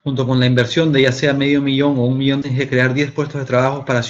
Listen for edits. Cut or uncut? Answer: cut